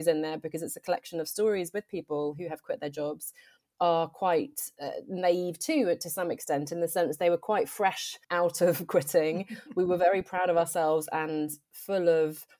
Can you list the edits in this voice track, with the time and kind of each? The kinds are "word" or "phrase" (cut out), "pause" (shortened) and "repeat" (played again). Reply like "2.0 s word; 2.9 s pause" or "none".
8.2 s pause